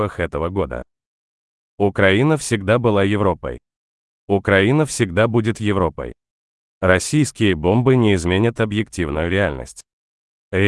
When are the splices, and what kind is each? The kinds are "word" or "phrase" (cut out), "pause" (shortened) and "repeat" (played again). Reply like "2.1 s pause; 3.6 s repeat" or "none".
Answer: none